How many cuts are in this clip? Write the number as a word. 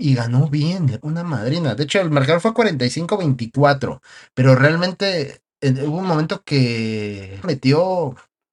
three